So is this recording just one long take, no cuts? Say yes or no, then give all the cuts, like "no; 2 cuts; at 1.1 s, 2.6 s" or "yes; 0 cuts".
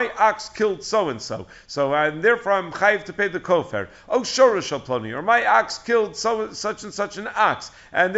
yes; 0 cuts